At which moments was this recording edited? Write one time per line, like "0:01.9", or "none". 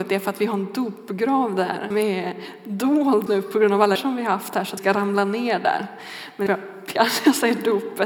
0:01.9
0:03.3
0:04.0
0:04.8
0:06.5
0:07.0